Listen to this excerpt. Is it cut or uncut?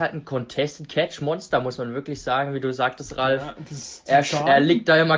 uncut